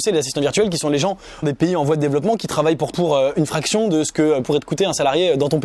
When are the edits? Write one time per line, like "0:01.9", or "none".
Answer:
0:01.4
0:02.9
0:04.4